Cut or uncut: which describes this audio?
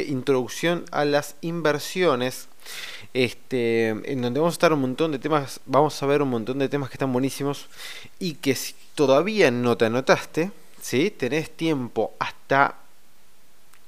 cut